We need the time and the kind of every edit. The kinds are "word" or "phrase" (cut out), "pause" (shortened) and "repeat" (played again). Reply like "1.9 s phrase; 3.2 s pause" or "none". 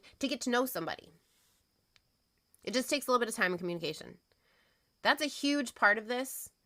none